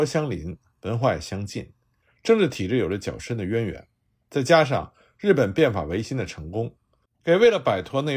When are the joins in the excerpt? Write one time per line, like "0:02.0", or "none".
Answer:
none

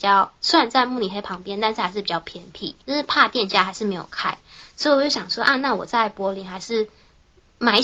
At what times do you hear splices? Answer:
0:02.8

